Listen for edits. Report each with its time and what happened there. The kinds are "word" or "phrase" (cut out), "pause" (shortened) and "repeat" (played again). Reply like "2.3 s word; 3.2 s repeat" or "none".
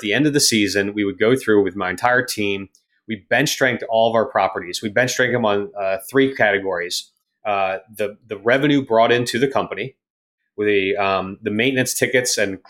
none